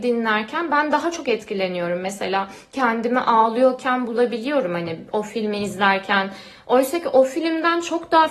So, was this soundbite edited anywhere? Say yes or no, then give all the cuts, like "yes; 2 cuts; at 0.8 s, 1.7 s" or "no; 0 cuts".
no; 0 cuts